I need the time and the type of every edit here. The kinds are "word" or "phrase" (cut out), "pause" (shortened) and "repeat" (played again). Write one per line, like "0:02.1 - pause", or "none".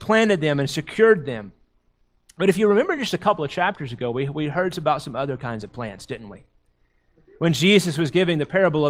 none